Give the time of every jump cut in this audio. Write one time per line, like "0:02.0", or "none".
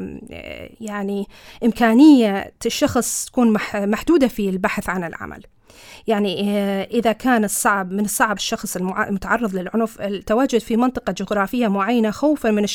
0:08.4